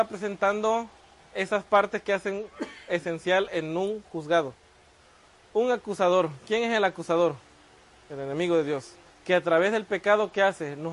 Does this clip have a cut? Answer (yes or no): yes